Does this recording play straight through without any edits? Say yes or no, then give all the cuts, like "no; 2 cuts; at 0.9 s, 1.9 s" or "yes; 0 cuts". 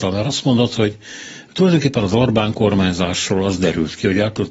yes; 0 cuts